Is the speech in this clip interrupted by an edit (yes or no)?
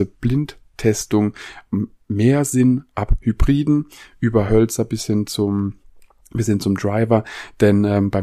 no